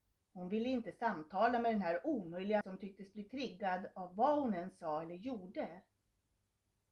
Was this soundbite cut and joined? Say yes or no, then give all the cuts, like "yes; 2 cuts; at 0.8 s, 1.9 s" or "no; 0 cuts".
yes; 1 cut; at 2.6 s